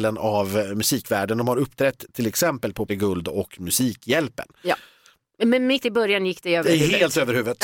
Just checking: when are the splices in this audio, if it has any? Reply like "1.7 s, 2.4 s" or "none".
2.9 s, 5.8 s